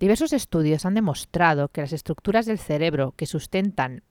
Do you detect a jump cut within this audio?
no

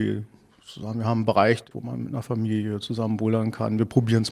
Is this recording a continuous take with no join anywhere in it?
yes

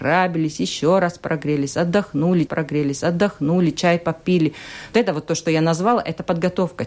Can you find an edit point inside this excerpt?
yes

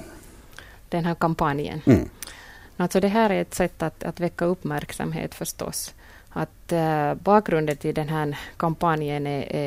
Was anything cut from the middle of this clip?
no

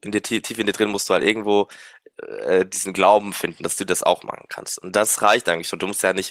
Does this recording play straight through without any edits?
yes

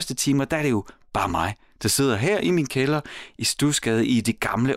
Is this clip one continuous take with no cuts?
yes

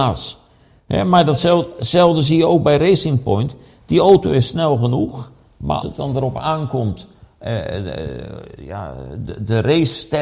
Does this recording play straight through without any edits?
no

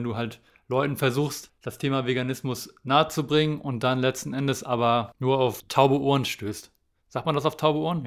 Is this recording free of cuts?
yes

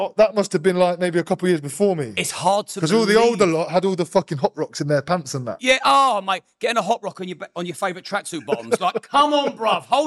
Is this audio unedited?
yes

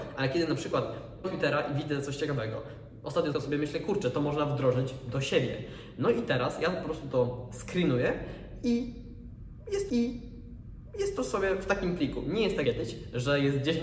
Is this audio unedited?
no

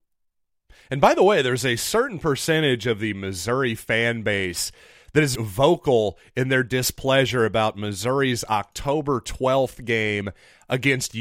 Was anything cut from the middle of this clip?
yes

